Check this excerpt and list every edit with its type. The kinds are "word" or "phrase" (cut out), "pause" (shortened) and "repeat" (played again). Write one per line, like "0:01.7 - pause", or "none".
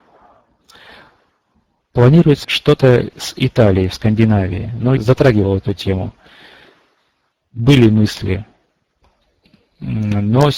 0:02.4 - word
0:03.1 - word
0:05.0 - word